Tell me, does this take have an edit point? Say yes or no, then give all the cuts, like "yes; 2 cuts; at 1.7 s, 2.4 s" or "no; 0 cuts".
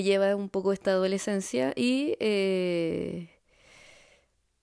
no; 0 cuts